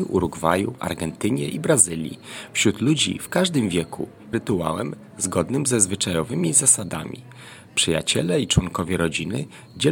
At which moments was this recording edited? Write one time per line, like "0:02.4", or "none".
0:04.3